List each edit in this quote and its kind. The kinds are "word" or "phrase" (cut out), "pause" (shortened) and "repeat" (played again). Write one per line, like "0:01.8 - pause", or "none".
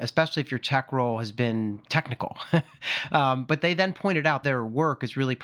0:01.9 - word
0:04.4 - phrase

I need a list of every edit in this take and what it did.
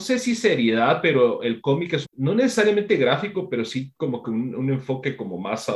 0:02.0 - phrase

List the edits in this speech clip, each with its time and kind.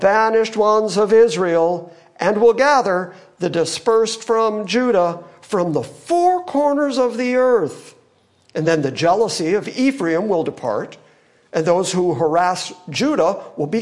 none

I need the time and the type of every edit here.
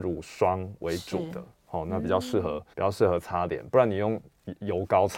0:02.7 - pause

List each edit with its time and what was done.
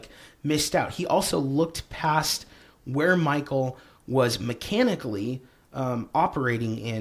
none

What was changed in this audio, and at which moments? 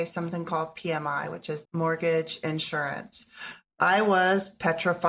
0:01.6 - word

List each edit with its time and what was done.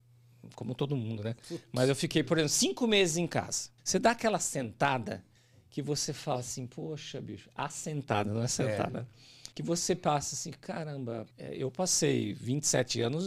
0:03.8 - pause
0:05.4 - pause
0:09.5 - pause
0:11.3 - pause

